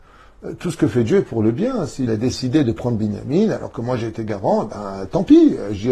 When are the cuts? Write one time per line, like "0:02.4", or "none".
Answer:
0:02.1